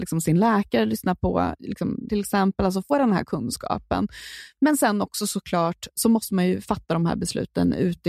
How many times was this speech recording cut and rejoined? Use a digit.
2